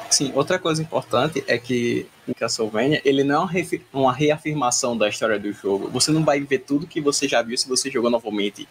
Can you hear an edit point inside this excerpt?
yes; 1 cut; at 2.3 s

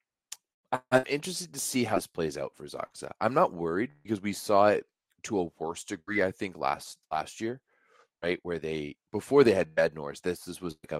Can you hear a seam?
yes; 1 cut; at 9.1 s

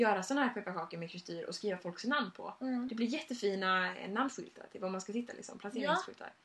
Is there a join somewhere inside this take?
no; 0 cuts

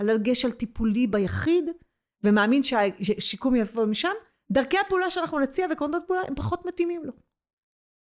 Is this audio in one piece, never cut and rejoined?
yes; 0 cuts

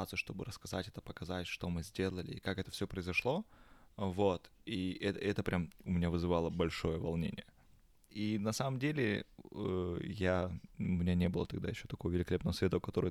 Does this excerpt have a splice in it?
no; 0 cuts

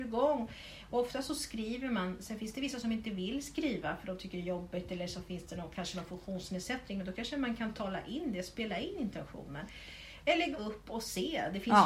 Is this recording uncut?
no; 1 cut; at 10.5 s

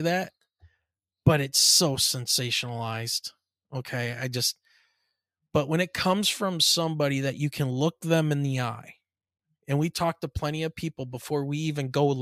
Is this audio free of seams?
yes; 0 cuts

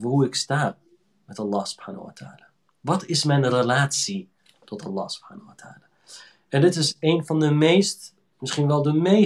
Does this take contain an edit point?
no; 0 cuts

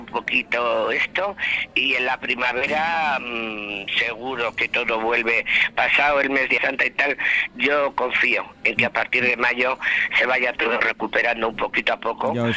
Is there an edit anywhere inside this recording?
yes; 1 cut; at 6.6 s

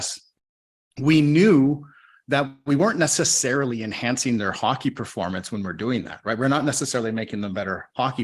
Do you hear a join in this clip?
no; 0 cuts

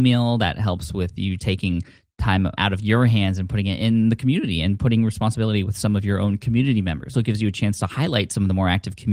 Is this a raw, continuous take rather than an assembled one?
no; 3 cuts; at 1.4 s, 2.6 s, 7.1 s

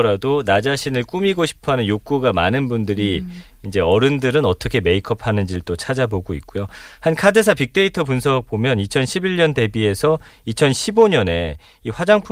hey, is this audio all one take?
yes; 0 cuts

